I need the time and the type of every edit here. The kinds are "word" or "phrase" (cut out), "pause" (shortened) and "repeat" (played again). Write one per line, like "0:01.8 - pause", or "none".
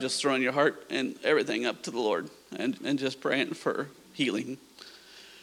0:02.8 - word